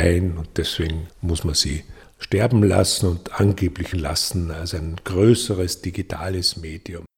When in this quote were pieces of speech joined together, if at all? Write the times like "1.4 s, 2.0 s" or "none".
3.9 s